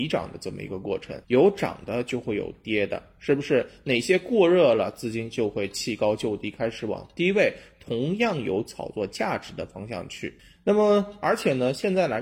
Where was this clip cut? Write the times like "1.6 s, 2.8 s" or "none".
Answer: 1.2 s, 10.4 s